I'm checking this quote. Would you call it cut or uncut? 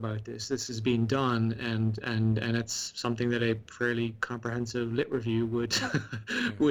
uncut